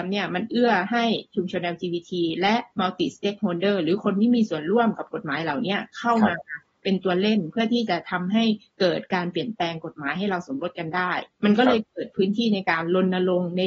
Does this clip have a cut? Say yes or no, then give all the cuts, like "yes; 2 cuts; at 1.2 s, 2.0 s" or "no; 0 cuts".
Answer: no; 0 cuts